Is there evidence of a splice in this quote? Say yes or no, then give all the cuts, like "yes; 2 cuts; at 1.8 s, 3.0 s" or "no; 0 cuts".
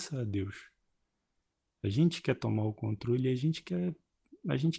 no; 0 cuts